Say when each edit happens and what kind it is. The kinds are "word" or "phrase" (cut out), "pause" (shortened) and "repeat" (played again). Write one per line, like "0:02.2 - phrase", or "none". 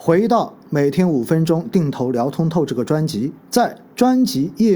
0:03.4 - pause

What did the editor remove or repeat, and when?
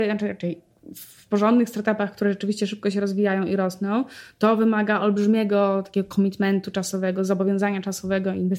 none

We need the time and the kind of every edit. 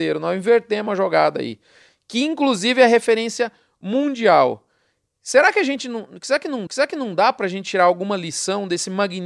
0:06.7 - repeat

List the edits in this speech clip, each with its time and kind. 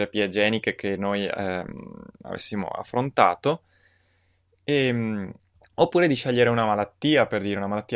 0:05.5 - pause

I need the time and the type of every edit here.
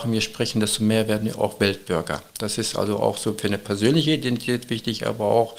none

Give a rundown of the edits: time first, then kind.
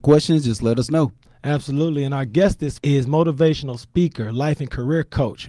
0:02.8 - word

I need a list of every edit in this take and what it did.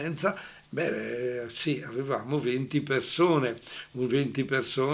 none

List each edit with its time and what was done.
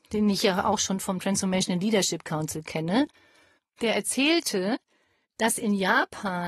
none

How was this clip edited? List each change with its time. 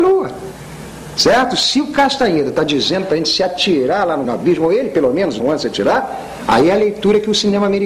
0:04.2 - word
0:05.4 - word

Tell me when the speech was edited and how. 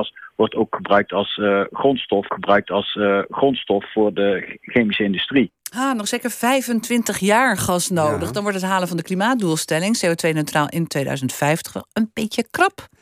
0:02.3 - repeat

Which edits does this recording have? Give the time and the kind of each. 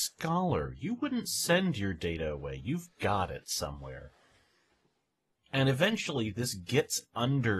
none

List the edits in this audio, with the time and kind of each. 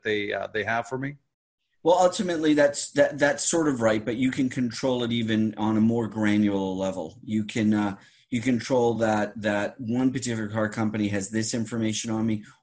none

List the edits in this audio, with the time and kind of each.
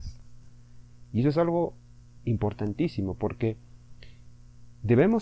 none

